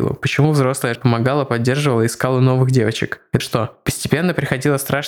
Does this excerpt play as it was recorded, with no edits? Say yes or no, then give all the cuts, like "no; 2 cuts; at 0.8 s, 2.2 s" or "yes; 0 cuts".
no; 2 cuts; at 0.9 s, 3.4 s